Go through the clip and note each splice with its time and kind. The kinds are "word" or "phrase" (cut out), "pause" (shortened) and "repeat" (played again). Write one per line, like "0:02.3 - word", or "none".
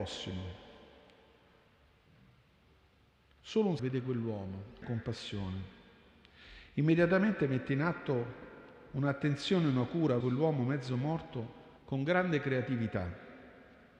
0:03.8 - word
0:04.8 - phrase
0:10.2 - word
0:11.8 - pause